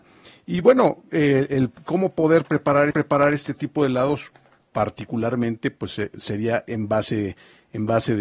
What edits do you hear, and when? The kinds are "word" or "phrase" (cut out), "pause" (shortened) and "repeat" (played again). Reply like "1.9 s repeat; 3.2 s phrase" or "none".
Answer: 2.9 s repeat

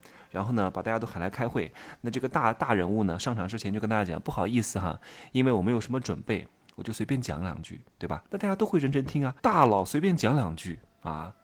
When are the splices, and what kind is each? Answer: 8.3 s pause; 9.4 s pause

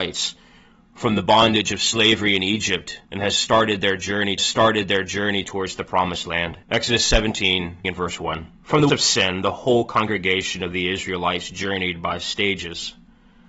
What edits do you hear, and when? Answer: 3.0 s pause; 4.4 s repeat; 6.6 s pause; 7.8 s word; 8.5 s pause; 8.9 s word

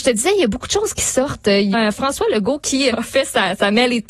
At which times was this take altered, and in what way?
1.7 s word; 2.9 s word

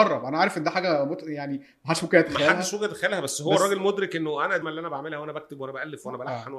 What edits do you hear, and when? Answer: 4.6 s word

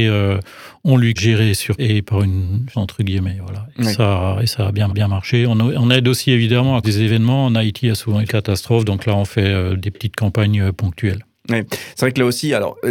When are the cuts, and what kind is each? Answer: 1.2 s phrase; 1.8 s phrase; 2.7 s word; 4.9 s repeat; 6.8 s word; 8.3 s phrase

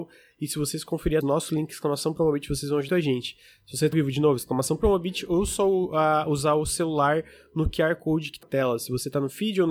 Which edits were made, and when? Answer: 1.2 s word; 2.9 s word; 3.9 s word; 8.4 s word

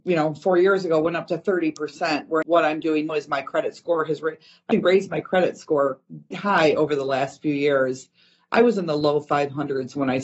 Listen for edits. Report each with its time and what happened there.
2.4 s word; 3.1 s word; 4.7 s word; 6.3 s word

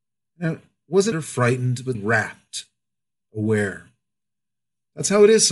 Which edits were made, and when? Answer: 1.1 s word; 1.9 s word

